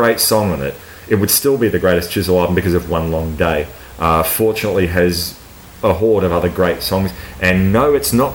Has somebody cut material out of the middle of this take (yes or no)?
no